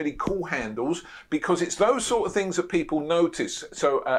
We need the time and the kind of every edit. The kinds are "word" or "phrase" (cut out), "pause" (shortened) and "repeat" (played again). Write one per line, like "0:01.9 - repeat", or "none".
none